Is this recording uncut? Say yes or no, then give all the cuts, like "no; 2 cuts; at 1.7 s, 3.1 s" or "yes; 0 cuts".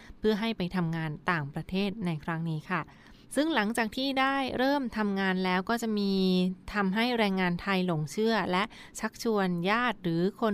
no; 1 cut; at 3.2 s